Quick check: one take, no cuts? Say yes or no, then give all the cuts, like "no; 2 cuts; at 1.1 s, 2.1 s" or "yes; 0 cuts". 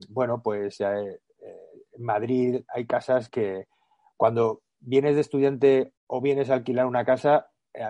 no; 2 cuts; at 3.3 s, 6.0 s